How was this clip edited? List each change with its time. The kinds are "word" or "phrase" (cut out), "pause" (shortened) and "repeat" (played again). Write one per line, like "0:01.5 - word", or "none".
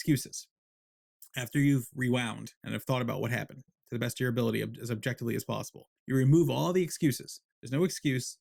0:02.6 - pause
0:06.0 - pause
0:07.5 - pause